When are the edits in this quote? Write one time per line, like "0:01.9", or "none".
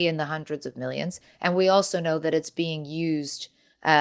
none